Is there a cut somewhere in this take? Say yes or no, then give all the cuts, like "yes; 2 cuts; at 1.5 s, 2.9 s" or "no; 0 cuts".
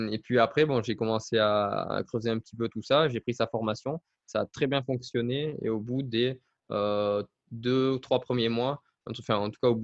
no; 0 cuts